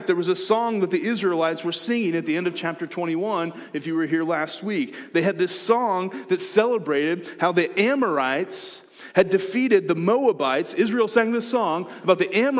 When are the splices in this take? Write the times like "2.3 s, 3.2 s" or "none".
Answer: none